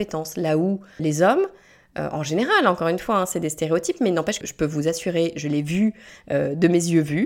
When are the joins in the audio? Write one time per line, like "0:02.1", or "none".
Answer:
0:01.0
0:04.4